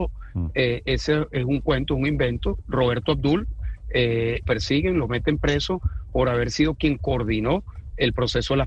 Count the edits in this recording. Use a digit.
1